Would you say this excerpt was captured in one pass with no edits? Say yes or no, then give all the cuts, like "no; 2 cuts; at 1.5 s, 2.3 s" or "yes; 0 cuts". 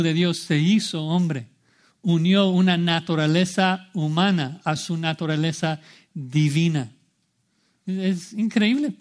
yes; 0 cuts